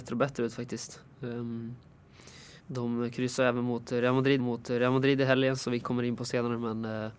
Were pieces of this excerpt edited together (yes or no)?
yes